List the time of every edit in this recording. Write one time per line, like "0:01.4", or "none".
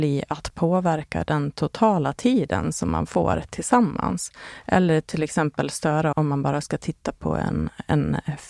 0:06.1